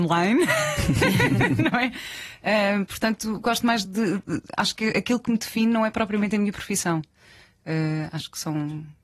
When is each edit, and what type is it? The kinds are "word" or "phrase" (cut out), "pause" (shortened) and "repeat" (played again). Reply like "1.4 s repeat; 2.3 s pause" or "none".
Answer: none